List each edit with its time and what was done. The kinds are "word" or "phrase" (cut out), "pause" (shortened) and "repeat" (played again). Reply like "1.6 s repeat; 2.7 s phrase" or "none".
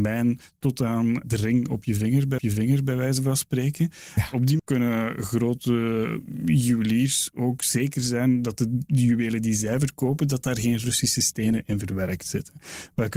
2.4 s repeat; 4.6 s word